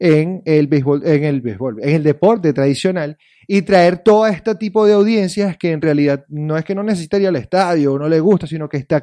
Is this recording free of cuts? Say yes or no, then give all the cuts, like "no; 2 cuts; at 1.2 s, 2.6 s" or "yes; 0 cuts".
yes; 0 cuts